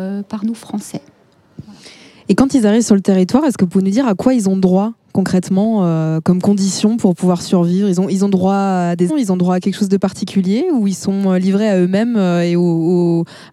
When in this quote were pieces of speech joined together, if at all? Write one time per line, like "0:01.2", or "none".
0:09.1